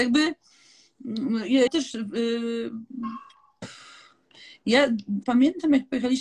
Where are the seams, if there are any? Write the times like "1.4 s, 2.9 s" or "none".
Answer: 1.7 s, 5.2 s